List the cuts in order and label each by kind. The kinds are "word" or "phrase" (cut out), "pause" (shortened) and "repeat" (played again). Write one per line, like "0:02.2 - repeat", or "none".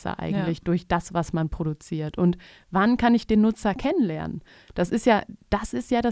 none